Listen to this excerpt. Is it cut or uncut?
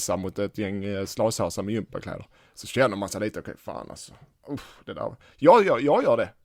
uncut